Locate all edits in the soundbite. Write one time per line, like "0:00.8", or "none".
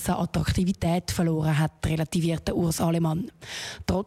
none